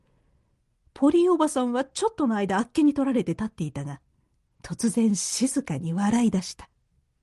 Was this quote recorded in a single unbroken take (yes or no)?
yes